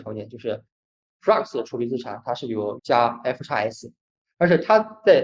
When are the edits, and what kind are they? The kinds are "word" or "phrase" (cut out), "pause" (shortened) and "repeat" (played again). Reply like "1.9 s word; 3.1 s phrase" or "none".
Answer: 2.8 s word